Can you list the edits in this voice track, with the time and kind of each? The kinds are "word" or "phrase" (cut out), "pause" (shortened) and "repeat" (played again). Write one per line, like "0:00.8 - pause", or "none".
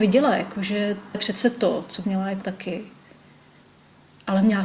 0:01.1 - word
0:02.0 - word
0:02.4 - word